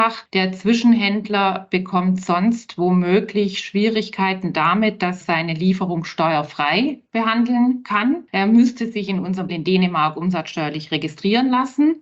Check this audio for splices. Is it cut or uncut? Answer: cut